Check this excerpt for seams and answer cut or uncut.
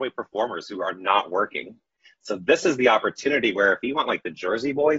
uncut